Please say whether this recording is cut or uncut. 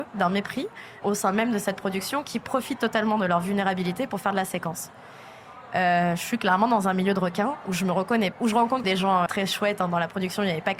cut